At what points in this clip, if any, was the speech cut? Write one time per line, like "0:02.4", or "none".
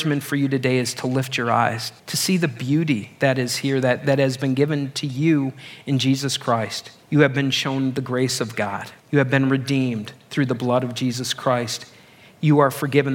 0:02.0
0:07.0
0:09.0